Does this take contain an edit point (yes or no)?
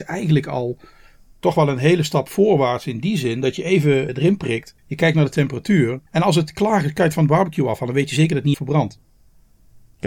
yes